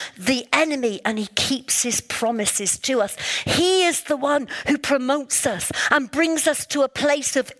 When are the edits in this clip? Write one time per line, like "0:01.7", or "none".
none